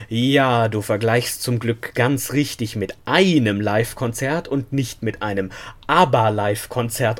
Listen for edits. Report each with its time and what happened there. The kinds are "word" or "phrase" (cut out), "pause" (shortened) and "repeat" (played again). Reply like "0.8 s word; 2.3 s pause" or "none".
none